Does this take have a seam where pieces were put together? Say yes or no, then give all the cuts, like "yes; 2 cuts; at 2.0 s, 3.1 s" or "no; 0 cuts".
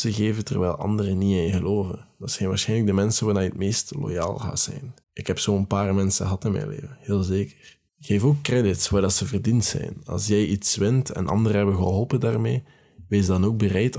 yes; 2 cuts; at 5.0 s, 7.9 s